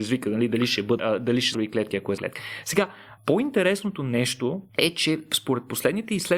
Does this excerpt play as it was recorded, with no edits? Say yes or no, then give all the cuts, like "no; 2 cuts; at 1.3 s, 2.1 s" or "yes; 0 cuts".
no; 5 cuts; at 1.0 s, 1.5 s, 2.2 s, 3.2 s, 4.7 s